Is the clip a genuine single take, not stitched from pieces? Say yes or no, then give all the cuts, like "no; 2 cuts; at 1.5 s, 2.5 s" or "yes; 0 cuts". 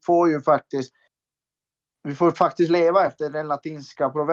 yes; 0 cuts